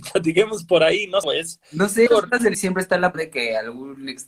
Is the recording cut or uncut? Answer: cut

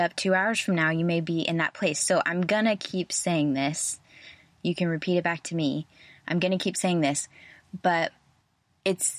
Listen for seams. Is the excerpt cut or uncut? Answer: uncut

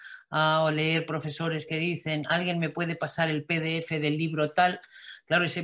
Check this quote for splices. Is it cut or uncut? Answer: uncut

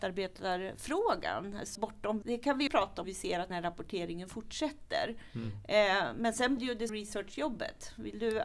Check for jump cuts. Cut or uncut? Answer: cut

